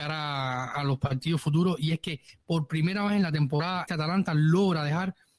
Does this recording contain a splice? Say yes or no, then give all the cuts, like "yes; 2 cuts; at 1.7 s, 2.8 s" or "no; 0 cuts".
yes; 1 cut; at 3.9 s